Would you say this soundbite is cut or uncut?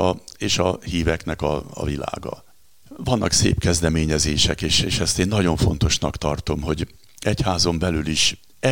uncut